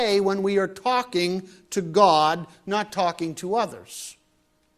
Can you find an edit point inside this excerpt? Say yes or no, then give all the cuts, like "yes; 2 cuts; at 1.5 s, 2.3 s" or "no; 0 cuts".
no; 0 cuts